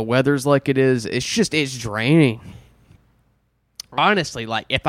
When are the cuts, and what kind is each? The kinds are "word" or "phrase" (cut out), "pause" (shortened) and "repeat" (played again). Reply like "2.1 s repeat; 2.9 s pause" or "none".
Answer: none